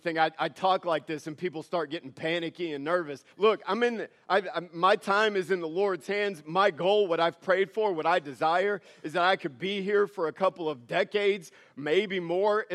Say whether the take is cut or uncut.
cut